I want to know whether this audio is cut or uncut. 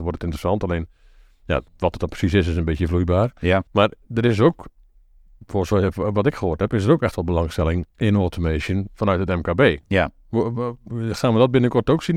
cut